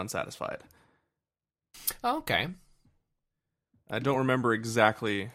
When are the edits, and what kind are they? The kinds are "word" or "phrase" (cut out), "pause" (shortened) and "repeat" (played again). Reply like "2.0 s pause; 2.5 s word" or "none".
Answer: none